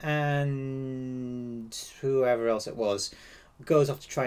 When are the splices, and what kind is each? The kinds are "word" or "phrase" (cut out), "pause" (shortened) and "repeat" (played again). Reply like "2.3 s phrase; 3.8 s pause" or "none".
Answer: 1.9 s pause